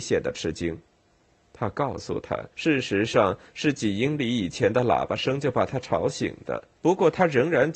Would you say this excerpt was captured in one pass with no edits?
no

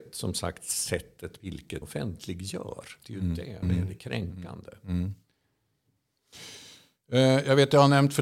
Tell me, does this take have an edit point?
yes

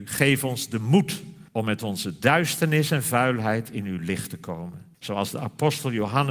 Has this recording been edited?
yes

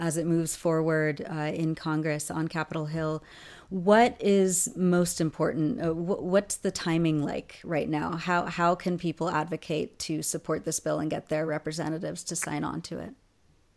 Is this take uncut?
yes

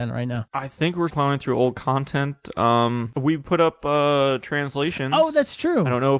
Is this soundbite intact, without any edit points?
no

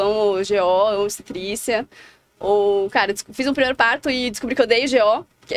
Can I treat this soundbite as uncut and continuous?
yes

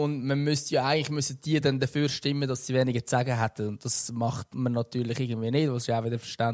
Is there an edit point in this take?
no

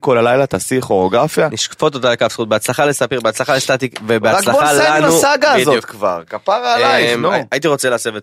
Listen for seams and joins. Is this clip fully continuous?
yes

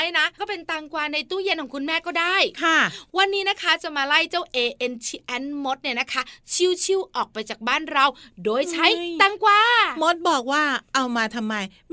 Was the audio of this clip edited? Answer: no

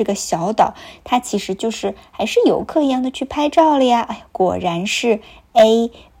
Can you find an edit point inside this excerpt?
no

